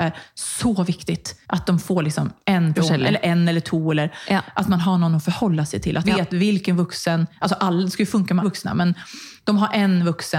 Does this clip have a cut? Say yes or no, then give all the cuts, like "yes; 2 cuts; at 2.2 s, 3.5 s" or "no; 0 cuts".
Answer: yes; 4 cuts; at 1.4 s, 2.8 s, 6.0 s, 8.4 s